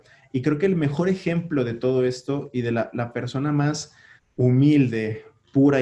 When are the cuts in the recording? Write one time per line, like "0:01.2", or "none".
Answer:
0:04.2